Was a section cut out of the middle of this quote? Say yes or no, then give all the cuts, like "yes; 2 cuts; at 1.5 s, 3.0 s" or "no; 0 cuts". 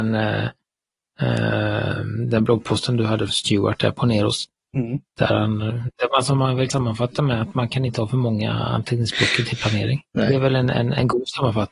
yes; 4 cuts; at 3.3 s, 5.1 s, 6.7 s, 10.1 s